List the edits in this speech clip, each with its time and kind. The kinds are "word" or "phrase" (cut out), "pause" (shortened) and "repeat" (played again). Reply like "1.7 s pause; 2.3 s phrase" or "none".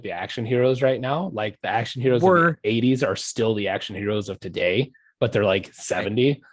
none